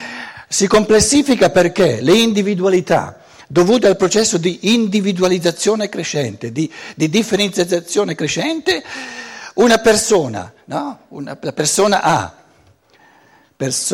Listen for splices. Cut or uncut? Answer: uncut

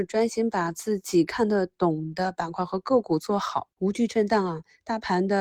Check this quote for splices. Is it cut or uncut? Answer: cut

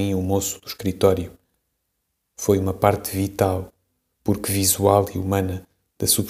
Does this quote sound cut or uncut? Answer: uncut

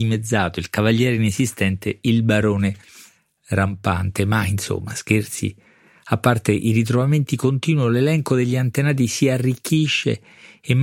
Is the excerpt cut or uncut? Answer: uncut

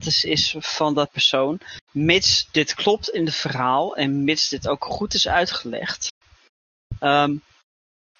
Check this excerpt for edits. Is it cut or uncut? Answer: cut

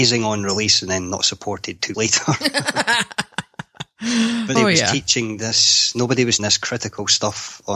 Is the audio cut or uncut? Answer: cut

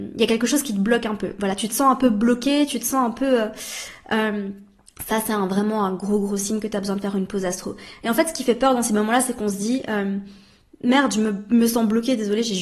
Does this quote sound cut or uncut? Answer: uncut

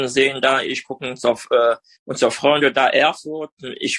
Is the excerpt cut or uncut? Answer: cut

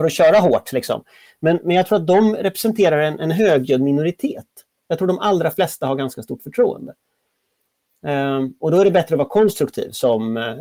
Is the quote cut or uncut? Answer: uncut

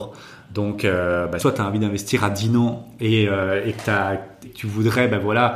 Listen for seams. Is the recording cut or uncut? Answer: cut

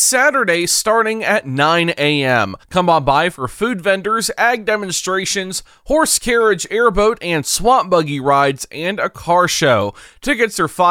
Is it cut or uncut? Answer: cut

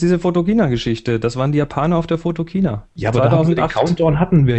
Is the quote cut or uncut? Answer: cut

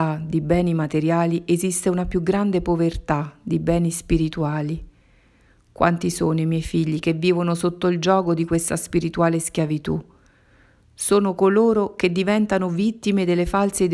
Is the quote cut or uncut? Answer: uncut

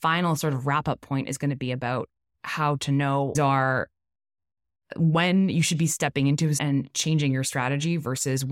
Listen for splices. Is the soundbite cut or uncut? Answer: cut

